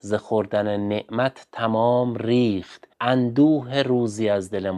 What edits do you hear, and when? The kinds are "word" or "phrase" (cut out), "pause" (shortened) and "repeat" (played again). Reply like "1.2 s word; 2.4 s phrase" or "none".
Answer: 2.9 s pause